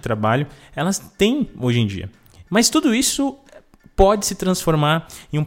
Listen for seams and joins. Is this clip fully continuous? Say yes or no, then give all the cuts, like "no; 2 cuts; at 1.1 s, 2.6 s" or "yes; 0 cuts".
yes; 0 cuts